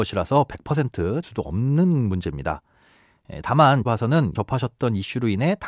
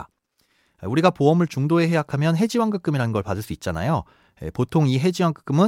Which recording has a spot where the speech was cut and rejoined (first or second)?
first